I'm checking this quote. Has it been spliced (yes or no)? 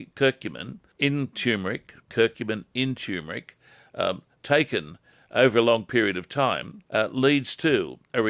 yes